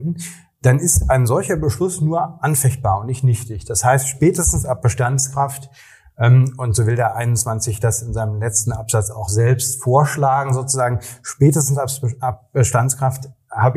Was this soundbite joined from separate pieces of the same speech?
no; 0 cuts

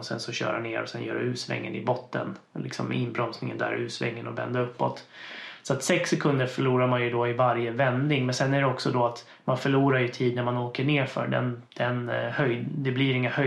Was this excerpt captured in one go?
no; 1 cut; at 11.7 s

